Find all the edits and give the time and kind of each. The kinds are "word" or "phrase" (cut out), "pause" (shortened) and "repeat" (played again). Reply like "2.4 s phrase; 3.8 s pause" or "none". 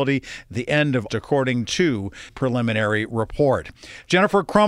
1.1 s word; 2.3 s word